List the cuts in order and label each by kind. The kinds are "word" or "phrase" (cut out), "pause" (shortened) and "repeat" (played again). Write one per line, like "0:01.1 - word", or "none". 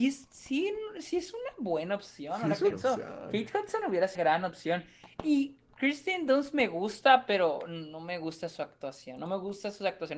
0:02.7 - phrase
0:04.2 - word